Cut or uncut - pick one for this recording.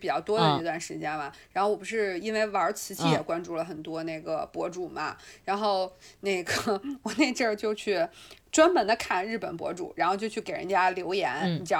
uncut